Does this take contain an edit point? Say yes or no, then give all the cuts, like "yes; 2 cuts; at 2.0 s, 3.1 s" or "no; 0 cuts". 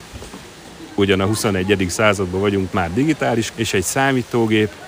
yes; 2 cuts; at 2.7 s, 3.5 s